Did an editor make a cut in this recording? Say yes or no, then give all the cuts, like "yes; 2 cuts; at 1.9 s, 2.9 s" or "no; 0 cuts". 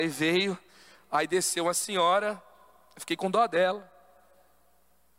no; 0 cuts